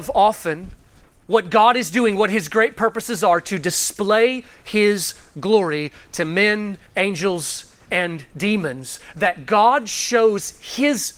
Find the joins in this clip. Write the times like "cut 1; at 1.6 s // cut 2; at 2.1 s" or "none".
cut 1; at 1.0 s // cut 2; at 6.9 s